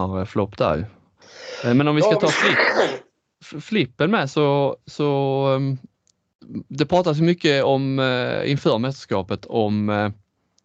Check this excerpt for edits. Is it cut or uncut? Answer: uncut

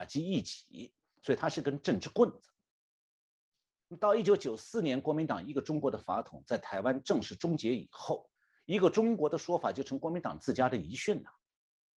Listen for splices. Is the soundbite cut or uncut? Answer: cut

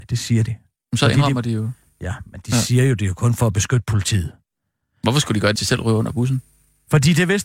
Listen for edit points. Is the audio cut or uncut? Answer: cut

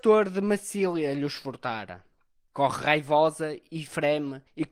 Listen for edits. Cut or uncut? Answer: uncut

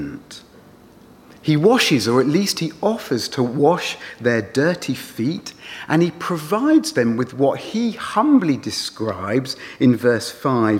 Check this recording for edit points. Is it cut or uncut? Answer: uncut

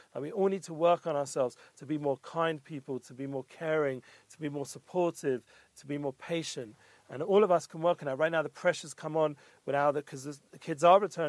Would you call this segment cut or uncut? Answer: uncut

